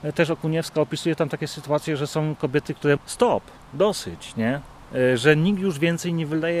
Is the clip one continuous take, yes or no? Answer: no